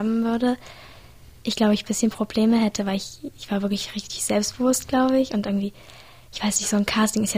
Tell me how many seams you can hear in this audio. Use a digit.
0